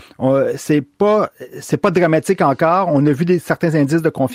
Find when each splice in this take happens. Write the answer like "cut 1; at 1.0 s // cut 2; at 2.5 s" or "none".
none

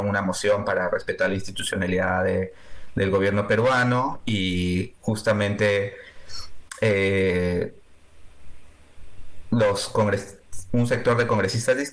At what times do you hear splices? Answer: none

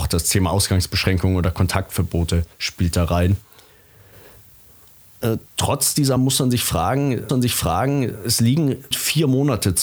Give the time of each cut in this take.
cut 1; at 2.5 s // cut 2; at 5.5 s // cut 3; at 6.2 s // cut 4; at 7.3 s // cut 5; at 8.9 s

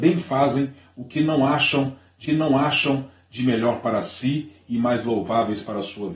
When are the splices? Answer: cut 1; at 2.2 s

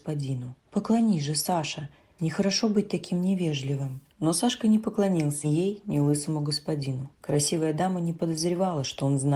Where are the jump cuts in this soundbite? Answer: cut 1; at 5.4 s

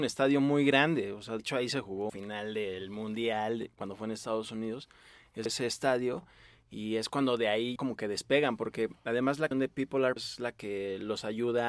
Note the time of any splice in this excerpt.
cut 1; at 1.4 s // cut 2; at 2.1 s // cut 3; at 5.5 s // cut 4; at 7.8 s // cut 5; at 9.5 s // cut 6; at 10.2 s

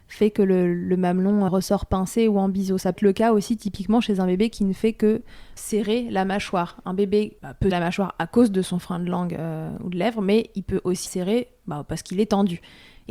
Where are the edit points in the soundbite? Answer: cut 1; at 1.5 s // cut 2; at 3.0 s // cut 3; at 5.6 s // cut 4; at 7.4 s // cut 5; at 7.7 s // cut 6; at 11.1 s

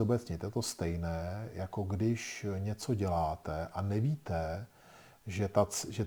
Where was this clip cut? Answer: none

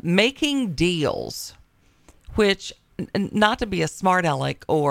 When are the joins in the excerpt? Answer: cut 1; at 2.9 s

